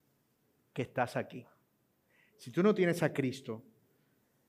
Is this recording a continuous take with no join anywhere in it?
yes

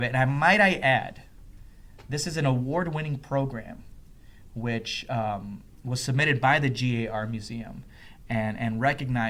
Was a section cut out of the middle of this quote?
no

